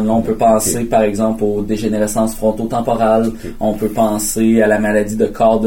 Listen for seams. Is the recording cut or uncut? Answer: uncut